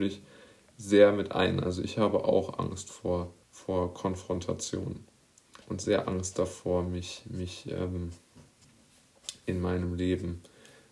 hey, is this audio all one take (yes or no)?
no